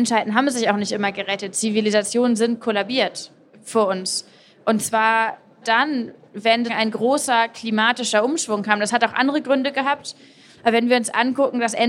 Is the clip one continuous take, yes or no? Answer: no